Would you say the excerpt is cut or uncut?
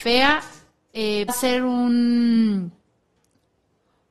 cut